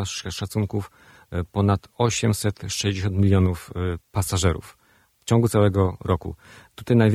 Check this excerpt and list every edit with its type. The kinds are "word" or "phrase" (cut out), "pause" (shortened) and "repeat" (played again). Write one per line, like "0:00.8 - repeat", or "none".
0:04.0 - pause